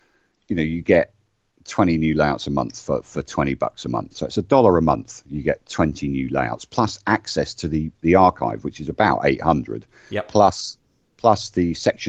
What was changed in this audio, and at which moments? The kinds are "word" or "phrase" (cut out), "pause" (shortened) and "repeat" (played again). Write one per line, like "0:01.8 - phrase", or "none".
none